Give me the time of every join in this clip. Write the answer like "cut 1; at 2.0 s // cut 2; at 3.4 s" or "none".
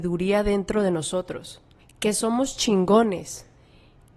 cut 1; at 1.8 s